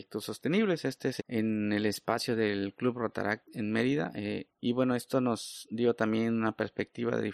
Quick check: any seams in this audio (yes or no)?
yes